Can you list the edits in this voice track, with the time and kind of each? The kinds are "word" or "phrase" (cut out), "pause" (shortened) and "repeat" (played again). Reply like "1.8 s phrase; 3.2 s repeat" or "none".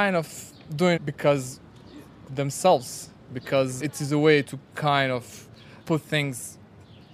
1.0 s word; 2.3 s word; 3.8 s word; 4.4 s word; 5.8 s word

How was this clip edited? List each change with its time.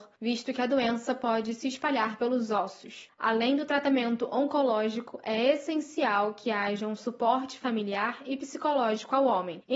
none

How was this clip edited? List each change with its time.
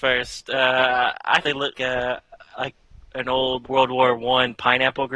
1.4 s word; 1.7 s word; 3.6 s word

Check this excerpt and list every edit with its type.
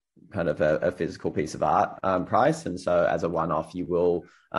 none

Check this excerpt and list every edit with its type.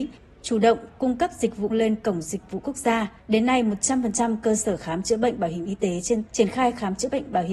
1.7 s word; 2.6 s word; 3.2 s pause; 6.3 s phrase

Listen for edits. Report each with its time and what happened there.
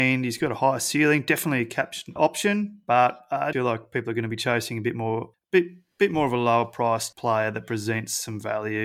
2.2 s phrase; 3.5 s word; 5.3 s word; 7.1 s word

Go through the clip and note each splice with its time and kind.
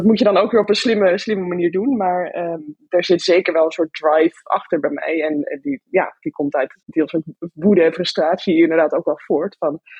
6.8 s pause

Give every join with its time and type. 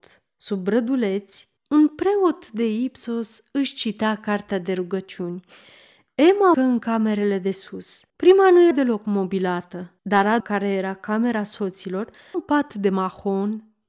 1.6 s pause; 6.5 s word; 8.1 s pause; 8.7 s word; 10.0 s pause; 10.4 s word; 12.3 s word

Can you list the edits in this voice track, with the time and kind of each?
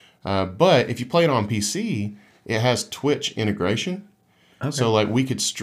none

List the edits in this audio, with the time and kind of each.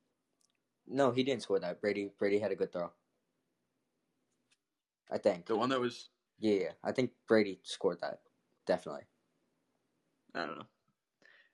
6.3 s word

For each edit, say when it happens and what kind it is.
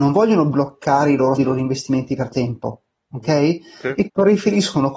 1.4 s word; 2.3 s word; 4.1 s word

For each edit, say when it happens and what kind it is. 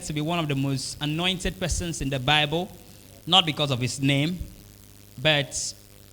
none

